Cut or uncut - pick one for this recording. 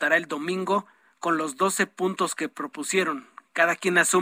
uncut